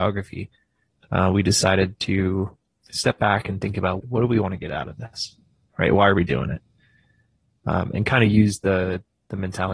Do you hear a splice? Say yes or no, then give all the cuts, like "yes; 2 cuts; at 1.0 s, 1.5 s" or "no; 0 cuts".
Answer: yes; 1 cut; at 4.0 s